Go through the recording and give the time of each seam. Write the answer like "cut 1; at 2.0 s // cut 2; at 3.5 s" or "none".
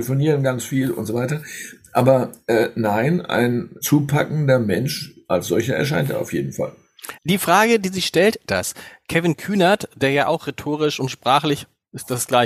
cut 1; at 3.8 s // cut 2; at 7.2 s // cut 3; at 8.5 s